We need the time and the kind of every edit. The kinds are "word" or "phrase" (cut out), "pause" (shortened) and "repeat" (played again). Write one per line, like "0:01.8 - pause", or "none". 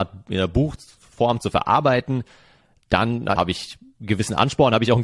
0:03.4 - word